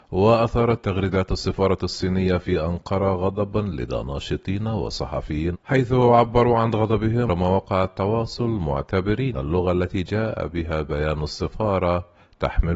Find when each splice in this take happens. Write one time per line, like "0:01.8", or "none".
0:05.5
0:07.3
0:09.3

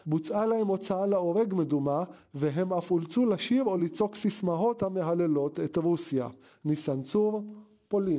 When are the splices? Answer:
none

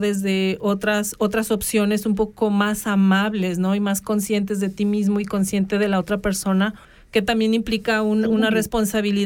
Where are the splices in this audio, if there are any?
0:06.8

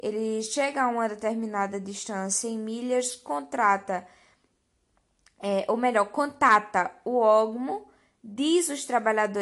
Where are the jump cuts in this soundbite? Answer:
none

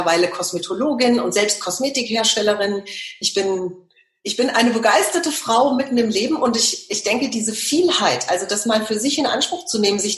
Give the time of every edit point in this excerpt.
none

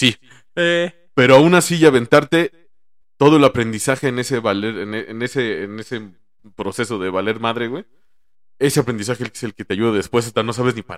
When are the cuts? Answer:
none

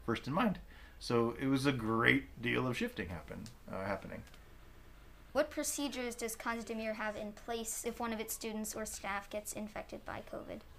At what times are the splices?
none

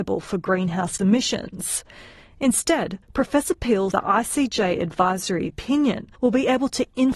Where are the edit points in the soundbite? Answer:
0:01.0
0:03.0
0:03.9
0:06.2

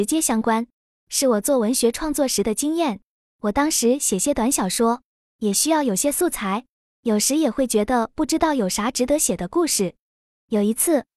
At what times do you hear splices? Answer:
none

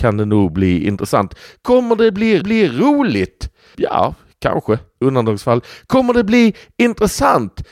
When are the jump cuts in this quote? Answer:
0:02.4
0:05.0

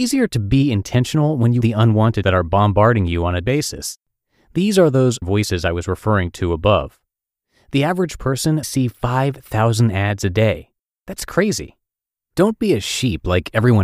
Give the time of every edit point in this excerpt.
0:01.6
0:02.2
0:03.4
0:05.2
0:08.6

